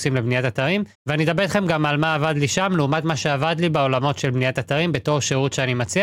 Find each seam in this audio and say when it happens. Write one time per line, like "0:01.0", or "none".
0:00.9